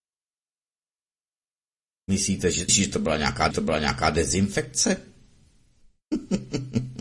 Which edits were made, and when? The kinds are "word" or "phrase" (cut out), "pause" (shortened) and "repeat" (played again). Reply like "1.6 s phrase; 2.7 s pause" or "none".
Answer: 2.7 s word; 3.5 s repeat